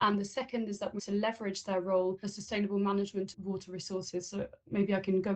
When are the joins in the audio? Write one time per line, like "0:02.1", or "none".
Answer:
0:01.0
0:02.2
0:03.3